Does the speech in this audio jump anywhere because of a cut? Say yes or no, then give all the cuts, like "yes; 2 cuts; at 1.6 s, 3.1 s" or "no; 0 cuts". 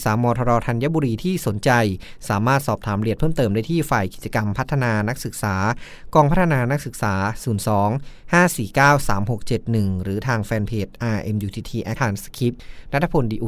yes; 1 cut; at 12.0 s